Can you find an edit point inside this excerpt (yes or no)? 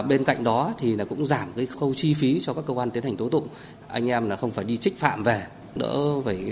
no